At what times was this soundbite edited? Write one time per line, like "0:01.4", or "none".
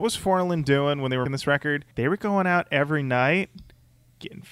0:01.3
0:01.9